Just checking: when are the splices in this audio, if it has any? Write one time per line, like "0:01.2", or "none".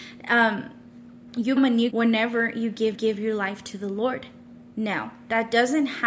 0:01.6
0:01.9
0:02.9